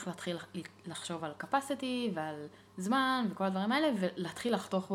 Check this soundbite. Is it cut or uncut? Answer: uncut